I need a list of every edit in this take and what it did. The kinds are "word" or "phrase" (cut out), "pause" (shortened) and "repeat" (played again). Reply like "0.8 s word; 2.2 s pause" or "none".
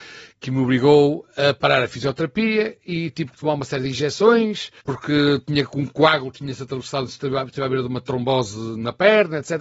4.8 s pause